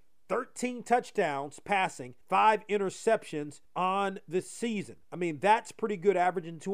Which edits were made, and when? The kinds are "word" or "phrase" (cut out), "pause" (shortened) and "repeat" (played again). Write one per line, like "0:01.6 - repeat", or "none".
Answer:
0:02.2 - pause
0:03.6 - pause
0:05.0 - pause